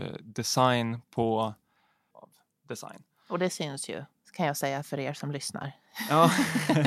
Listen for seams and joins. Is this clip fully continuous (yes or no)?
no